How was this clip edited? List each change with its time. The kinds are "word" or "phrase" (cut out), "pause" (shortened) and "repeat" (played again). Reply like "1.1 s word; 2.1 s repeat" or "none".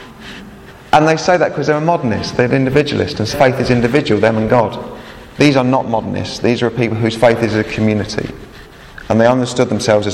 3.3 s word; 5.3 s pause